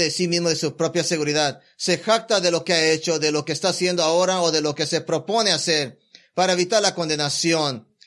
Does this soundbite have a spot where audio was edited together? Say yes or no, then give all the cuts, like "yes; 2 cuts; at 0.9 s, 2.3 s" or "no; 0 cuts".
no; 0 cuts